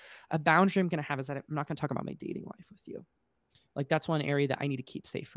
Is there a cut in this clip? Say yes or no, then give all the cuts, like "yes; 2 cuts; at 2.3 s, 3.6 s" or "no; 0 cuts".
no; 0 cuts